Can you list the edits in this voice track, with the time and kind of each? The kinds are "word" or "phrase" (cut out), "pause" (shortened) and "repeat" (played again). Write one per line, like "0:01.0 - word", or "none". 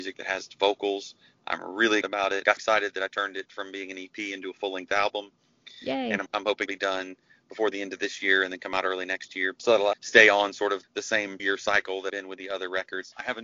0:02.0 - word
0:02.6 - word
0:06.3 - word
0:06.7 - word
0:09.9 - word
0:10.8 - word
0:11.4 - word
0:12.1 - word